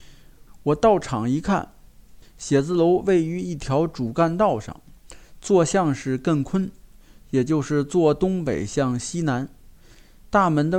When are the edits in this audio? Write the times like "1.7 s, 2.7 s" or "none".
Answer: none